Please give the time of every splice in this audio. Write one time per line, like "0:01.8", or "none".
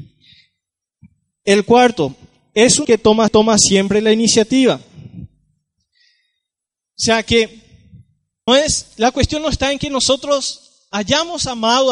0:02.8
0:03.3
0:08.5